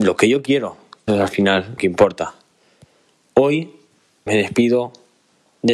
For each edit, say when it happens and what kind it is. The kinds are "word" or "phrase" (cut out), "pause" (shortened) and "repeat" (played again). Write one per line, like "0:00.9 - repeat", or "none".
0:01.1 - word
0:01.8 - word
0:04.3 - word